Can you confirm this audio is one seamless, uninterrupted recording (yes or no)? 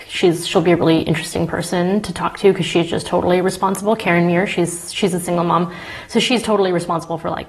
yes